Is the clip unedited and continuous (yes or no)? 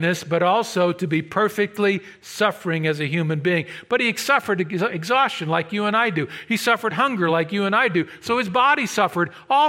yes